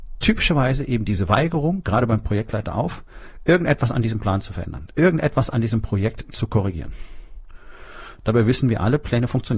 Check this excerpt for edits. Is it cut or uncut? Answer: uncut